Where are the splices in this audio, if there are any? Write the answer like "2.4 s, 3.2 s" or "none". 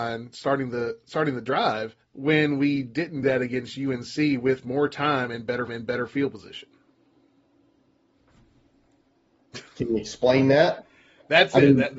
2.0 s, 3.2 s, 5.7 s